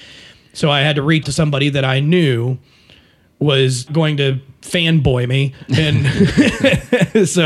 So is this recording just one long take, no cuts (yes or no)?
no